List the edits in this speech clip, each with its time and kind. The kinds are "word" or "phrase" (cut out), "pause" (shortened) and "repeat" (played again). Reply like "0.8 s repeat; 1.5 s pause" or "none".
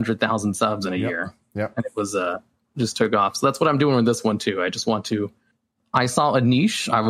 none